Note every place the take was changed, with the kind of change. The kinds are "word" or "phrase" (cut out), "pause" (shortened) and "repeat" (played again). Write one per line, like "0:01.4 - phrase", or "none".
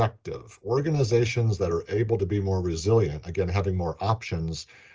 none